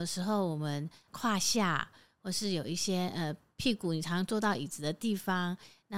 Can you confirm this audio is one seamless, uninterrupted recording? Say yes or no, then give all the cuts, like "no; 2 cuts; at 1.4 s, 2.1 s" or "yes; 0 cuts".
yes; 0 cuts